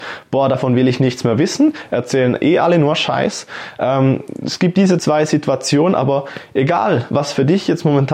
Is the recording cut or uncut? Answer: uncut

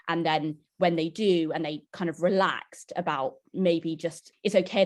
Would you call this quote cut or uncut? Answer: uncut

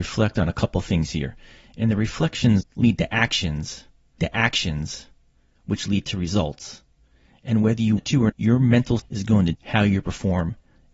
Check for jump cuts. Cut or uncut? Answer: cut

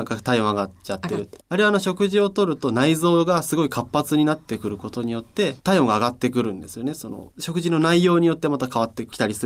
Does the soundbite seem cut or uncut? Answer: cut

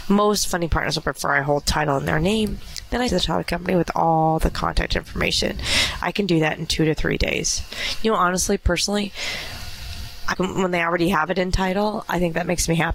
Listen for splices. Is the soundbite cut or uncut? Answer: cut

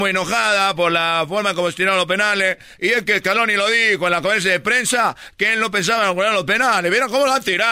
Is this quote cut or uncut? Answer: uncut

